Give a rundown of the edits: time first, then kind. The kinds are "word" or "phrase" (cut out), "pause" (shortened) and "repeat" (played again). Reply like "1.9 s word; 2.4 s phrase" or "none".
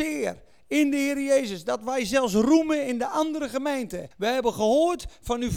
4.1 s pause

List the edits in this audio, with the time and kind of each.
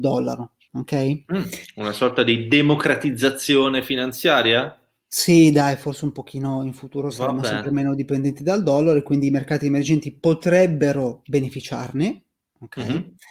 none

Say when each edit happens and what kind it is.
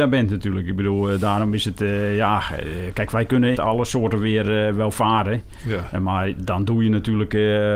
3.5 s phrase

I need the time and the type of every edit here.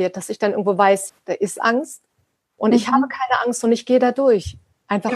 1.1 s word

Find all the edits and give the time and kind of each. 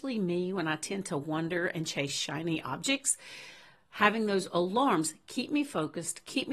none

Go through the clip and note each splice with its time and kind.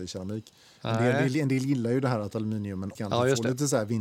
3.0 s phrase

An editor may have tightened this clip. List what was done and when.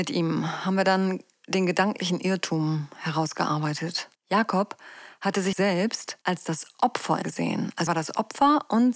4.1 s pause; 5.5 s word; 6.2 s pause; 7.2 s phrase; 7.9 s word

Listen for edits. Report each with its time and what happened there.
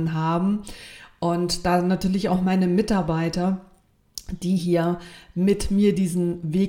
none

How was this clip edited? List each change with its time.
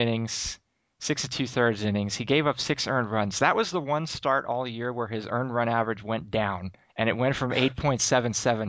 6.8 s pause

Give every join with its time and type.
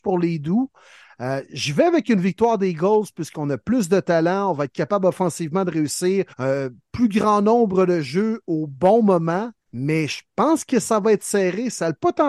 6.3 s pause; 9.6 s pause

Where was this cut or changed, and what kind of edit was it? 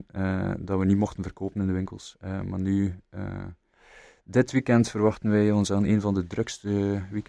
none

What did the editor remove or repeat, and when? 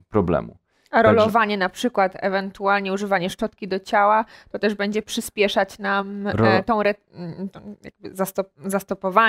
none

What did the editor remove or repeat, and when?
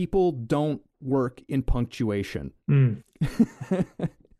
2.6 s pause

